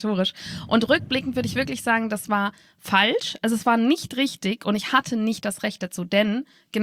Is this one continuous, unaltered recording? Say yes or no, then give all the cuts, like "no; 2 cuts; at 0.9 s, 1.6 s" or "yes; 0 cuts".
yes; 0 cuts